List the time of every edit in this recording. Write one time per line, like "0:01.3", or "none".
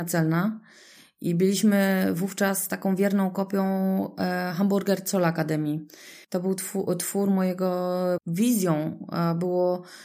0:06.2
0:08.2